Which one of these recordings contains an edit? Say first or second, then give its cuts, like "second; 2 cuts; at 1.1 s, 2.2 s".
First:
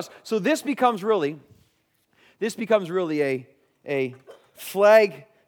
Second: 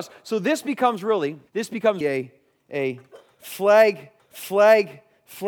second; 3 cuts; at 1.5 s, 2.0 s, 4.2 s